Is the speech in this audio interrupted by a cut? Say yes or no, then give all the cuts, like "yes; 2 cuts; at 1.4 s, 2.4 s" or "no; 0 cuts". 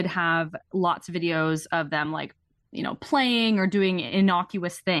no; 0 cuts